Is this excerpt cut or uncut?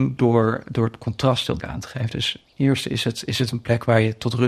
cut